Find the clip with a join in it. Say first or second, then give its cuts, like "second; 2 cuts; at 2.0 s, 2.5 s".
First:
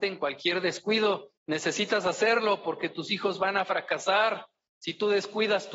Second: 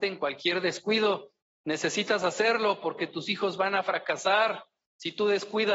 first; 1 cut; at 1.4 s